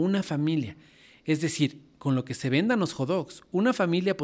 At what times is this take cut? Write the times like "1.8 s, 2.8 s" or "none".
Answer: none